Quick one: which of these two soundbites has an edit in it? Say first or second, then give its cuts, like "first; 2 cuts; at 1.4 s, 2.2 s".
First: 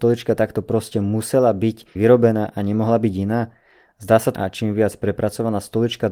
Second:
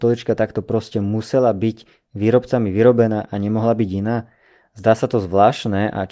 first; 2 cuts; at 1.9 s, 4.3 s